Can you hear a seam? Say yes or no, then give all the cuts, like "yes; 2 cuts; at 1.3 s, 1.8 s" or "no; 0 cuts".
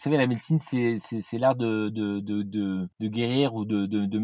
no; 0 cuts